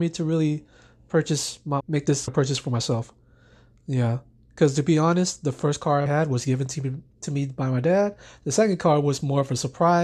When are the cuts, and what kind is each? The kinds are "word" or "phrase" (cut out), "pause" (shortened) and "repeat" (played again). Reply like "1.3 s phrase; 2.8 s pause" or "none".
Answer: 1.8 s word; 2.3 s word; 6.1 s word